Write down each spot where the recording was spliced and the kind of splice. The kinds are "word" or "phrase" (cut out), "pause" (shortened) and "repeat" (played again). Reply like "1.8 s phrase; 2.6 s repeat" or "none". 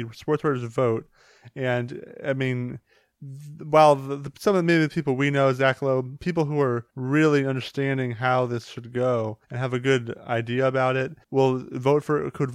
6.9 s pause; 9.4 s pause; 11.2 s pause